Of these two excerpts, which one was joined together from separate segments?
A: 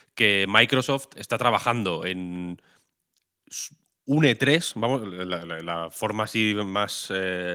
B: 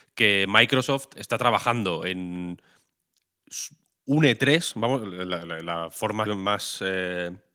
B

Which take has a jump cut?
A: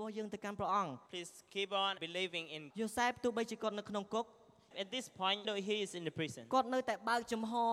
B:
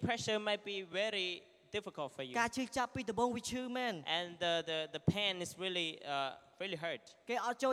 A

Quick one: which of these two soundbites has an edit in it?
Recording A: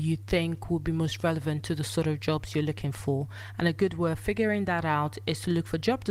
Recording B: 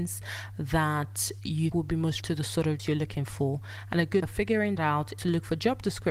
B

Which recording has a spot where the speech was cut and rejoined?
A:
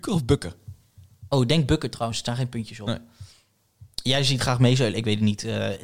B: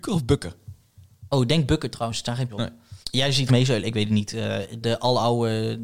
B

